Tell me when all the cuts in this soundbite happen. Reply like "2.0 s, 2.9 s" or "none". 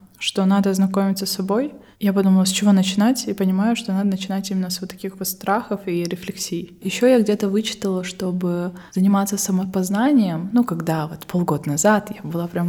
none